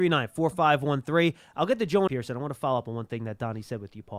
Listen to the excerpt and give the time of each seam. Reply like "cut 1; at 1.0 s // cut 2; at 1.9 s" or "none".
cut 1; at 2.1 s